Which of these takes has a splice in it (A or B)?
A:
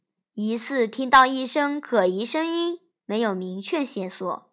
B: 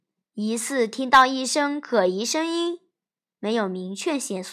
A